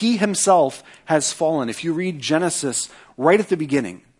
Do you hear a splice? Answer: no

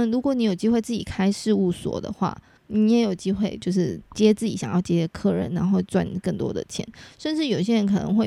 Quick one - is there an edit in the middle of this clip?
no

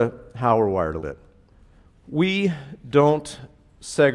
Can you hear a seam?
yes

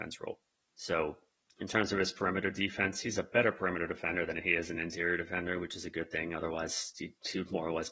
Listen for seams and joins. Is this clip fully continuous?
yes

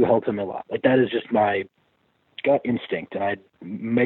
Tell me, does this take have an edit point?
no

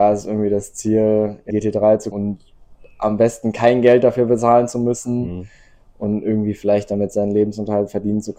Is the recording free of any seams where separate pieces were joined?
no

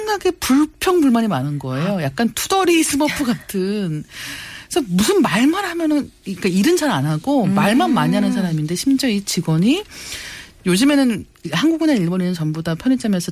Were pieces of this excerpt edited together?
no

